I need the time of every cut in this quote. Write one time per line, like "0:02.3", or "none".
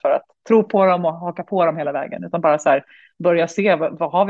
none